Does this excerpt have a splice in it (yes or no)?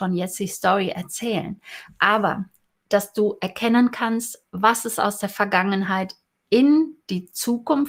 no